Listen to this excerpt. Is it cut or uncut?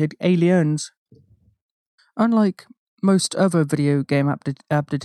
uncut